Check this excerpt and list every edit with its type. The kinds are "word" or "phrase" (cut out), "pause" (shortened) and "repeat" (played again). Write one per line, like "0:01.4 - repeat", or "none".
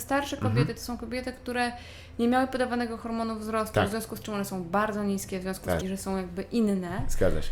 0:05.8 - phrase